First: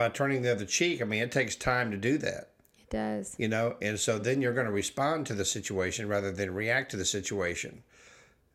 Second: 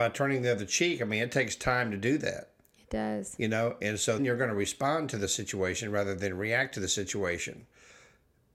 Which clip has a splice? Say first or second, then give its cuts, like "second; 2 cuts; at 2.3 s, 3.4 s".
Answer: second; 1 cut; at 4.2 s